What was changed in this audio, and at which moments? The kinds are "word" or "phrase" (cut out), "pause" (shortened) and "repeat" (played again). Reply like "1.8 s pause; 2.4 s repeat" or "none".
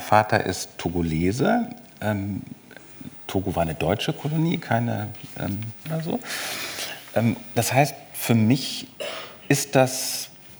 5.8 s word